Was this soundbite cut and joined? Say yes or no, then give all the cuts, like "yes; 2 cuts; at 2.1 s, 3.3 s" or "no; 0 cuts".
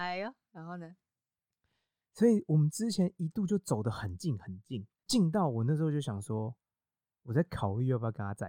yes; 1 cut; at 5.0 s